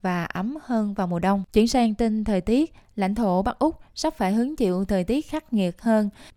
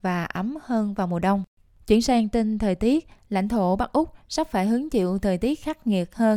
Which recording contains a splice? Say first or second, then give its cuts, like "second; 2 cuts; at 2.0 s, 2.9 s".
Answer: first; 1 cut; at 1.5 s